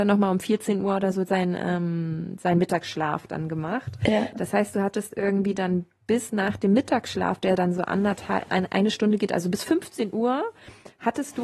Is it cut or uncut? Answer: uncut